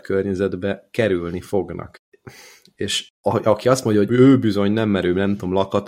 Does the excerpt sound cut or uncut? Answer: cut